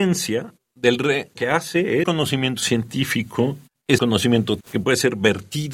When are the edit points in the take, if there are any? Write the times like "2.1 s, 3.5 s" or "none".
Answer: 1.4 s, 2.0 s, 4.0 s, 4.6 s